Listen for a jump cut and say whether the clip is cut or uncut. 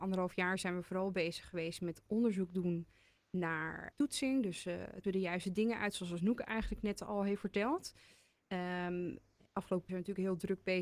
cut